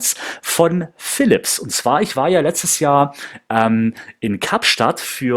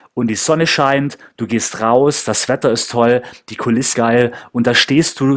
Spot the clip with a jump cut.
second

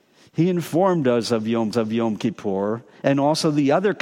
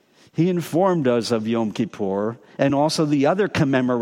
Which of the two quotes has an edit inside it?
first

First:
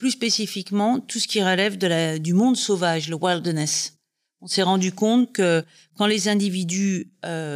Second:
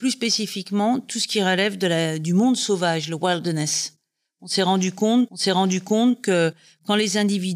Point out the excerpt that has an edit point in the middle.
second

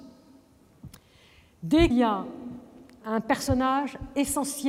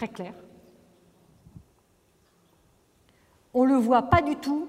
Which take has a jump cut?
first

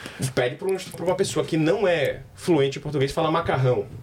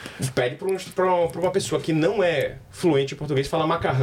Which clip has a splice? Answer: first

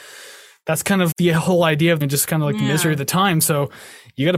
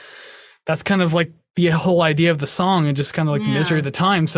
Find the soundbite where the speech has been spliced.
first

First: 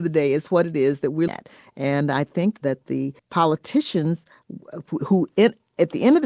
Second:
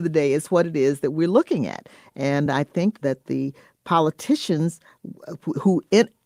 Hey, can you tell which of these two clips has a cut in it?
first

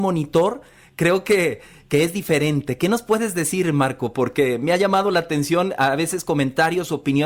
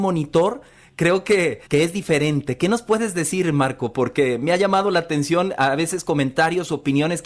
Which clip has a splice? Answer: second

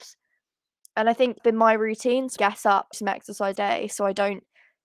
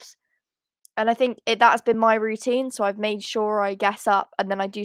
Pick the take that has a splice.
first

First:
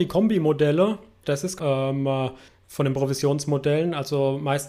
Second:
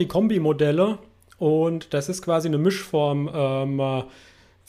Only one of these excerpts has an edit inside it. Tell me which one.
first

